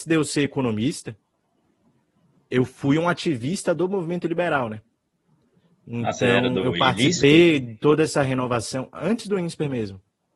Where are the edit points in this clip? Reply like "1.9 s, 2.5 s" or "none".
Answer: none